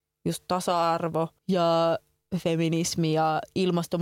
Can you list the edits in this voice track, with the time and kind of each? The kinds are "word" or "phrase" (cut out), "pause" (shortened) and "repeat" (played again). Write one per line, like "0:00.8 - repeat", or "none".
0:01.4 - pause